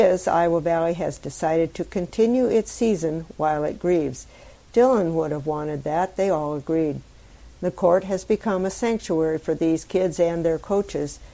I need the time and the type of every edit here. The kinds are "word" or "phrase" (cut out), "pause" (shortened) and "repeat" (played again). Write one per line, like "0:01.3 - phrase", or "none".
none